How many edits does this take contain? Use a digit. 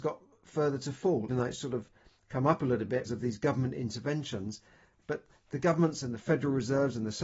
2